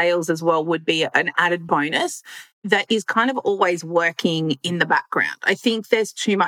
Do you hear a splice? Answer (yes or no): no